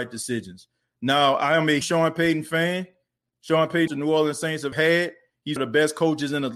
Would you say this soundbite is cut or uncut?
cut